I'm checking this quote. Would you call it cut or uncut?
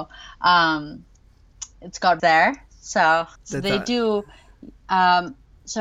cut